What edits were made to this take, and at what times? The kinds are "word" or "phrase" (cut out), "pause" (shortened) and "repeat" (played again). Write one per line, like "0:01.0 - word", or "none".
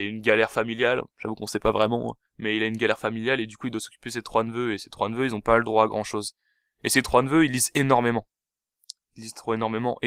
0:02.3 - pause